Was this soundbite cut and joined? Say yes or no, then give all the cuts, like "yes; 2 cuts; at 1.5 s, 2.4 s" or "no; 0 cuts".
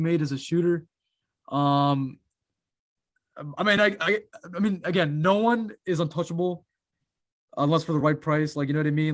no; 0 cuts